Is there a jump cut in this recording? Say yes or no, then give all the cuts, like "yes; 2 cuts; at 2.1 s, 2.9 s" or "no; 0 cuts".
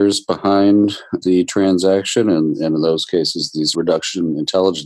yes; 2 cuts; at 1.2 s, 3.7 s